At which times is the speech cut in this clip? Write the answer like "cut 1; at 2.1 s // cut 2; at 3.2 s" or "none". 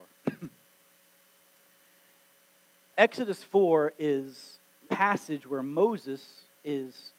cut 1; at 2.9 s // cut 2; at 4.9 s